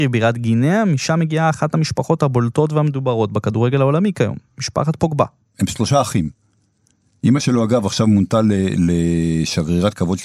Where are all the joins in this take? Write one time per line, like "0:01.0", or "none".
none